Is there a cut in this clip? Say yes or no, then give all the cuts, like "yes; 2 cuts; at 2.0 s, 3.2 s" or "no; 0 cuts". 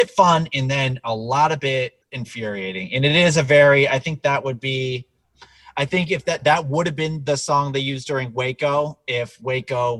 yes; 1 cut; at 2.0 s